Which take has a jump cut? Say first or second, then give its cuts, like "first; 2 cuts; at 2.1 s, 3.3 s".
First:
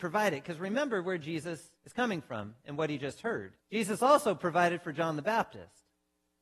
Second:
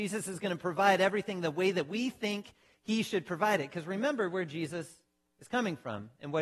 first; 2 cuts; at 1.8 s, 3.6 s